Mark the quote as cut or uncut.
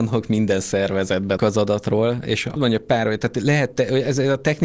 cut